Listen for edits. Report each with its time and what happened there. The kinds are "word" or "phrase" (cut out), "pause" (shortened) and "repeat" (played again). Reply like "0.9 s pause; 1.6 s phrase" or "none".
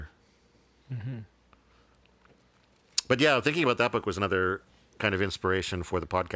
none